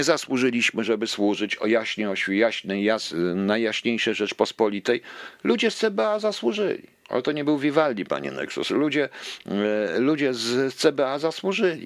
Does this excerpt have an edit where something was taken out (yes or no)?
yes